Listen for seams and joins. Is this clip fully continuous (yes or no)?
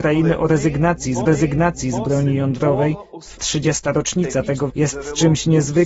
no